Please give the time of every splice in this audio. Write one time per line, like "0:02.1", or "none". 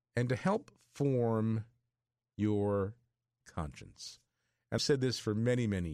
0:03.4
0:04.8